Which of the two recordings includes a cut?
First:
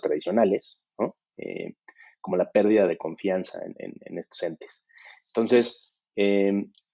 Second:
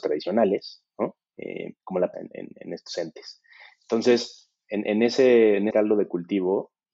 second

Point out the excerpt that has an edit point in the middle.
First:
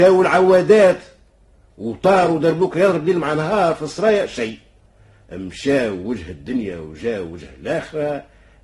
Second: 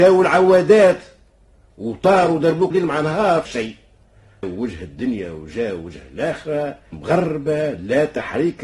second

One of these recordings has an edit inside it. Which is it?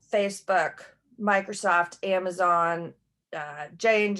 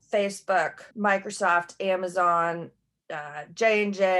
second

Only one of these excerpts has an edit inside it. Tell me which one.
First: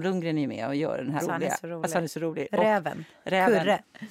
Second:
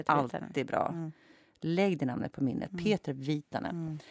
first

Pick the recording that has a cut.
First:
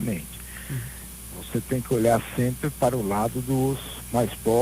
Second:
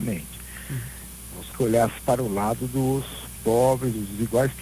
second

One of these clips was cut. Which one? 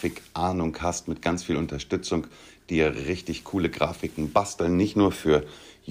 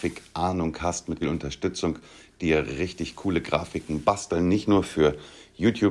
second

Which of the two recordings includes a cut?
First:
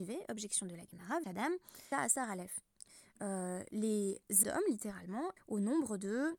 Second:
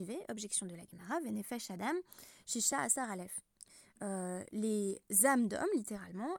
first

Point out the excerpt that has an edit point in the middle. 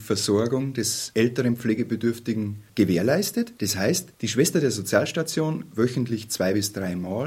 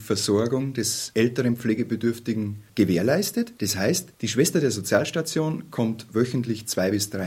first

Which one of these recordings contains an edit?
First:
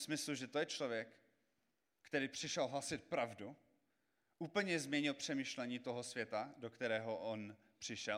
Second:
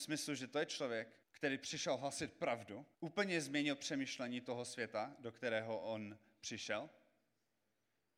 second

